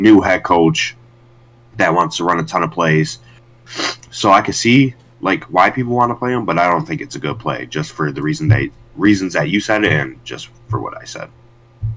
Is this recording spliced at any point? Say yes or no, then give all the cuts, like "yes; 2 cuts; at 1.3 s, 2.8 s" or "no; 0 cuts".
no; 0 cuts